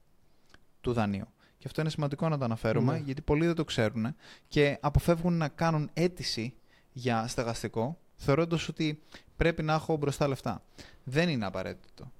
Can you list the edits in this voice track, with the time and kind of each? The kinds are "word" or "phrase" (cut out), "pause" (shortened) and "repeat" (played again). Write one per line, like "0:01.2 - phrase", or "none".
none